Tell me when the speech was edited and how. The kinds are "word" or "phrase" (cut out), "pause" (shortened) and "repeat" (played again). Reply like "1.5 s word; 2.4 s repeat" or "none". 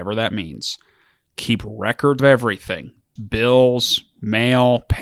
2.2 s word; 3.2 s word